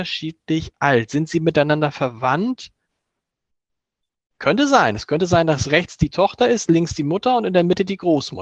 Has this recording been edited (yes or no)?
no